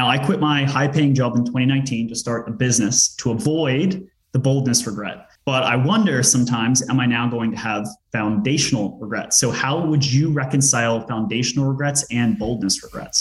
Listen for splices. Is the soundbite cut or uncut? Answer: cut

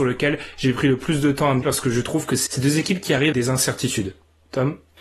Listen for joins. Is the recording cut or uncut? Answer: cut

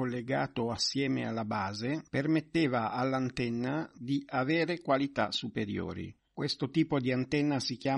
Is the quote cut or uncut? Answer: uncut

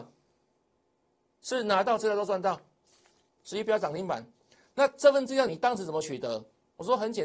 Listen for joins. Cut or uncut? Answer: uncut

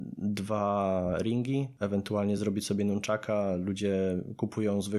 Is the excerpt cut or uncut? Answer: uncut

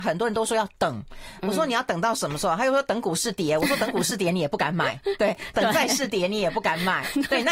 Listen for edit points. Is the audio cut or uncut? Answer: uncut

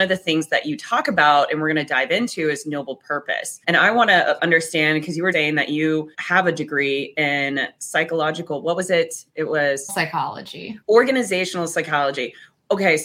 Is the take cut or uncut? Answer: cut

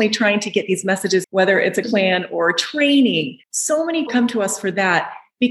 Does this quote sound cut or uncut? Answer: cut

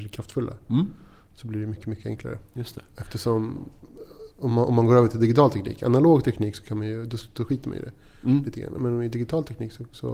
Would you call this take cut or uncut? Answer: uncut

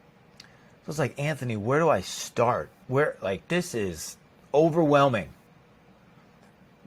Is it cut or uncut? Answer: uncut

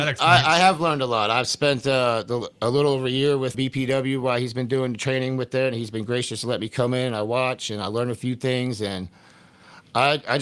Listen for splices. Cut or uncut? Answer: cut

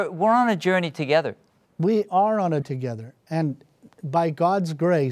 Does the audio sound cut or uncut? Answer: cut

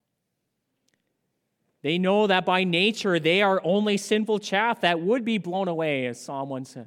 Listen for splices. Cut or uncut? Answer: uncut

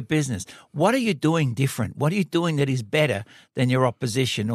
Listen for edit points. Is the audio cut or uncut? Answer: uncut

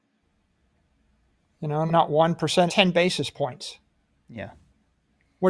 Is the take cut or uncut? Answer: cut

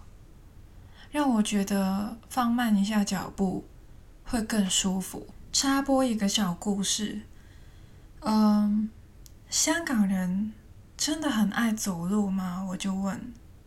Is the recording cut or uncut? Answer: uncut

